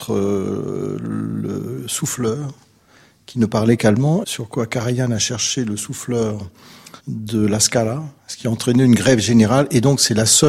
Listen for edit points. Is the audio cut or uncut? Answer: cut